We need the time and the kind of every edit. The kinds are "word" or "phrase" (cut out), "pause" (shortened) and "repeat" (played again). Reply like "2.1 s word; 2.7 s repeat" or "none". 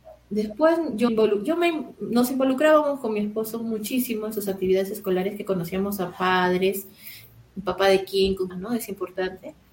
1.1 s word; 8.5 s phrase